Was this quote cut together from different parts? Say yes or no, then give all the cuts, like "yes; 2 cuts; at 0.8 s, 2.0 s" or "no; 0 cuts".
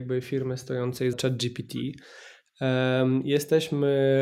yes; 1 cut; at 1.1 s